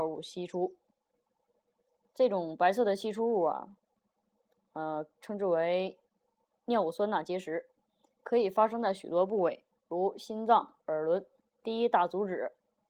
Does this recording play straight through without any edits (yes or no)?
yes